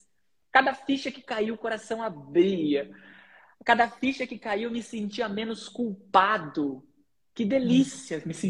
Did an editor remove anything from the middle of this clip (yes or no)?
no